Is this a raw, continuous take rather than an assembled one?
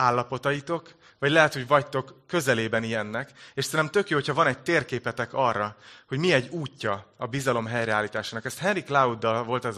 yes; 0 cuts

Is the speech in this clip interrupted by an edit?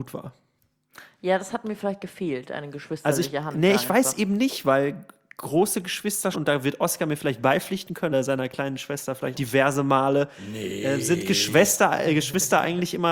yes; 3 cuts; at 6.3 s, 8.1 s, 9.3 s

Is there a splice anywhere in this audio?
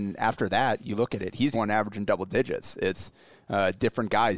yes; 1 cut; at 1.5 s

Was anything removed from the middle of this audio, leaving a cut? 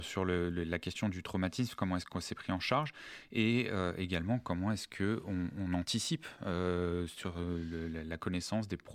no; 0 cuts

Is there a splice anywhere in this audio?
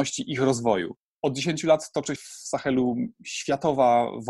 yes; 1 cut; at 2.2 s

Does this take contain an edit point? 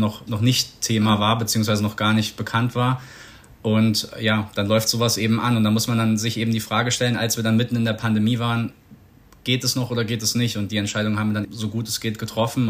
yes; 1 cut; at 11.4 s

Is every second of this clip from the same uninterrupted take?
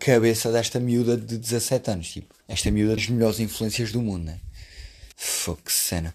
no; 3 cuts; at 2.4 s, 3.0 s, 5.1 s

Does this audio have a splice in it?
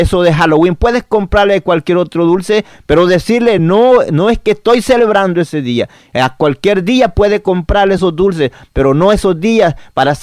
no; 0 cuts

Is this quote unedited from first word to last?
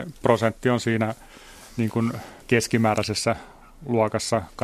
no; 1 cut; at 2.4 s

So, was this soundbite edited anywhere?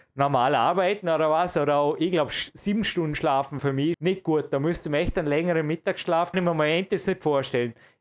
yes; 3 cuts; at 3.6 s, 3.9 s, 6.3 s

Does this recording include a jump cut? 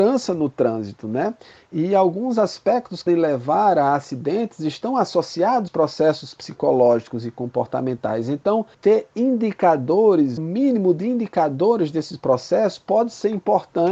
yes; 4 cuts; at 3.1 s, 5.7 s, 8.7 s, 10.4 s

